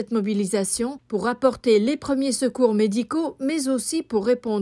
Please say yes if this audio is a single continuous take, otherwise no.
yes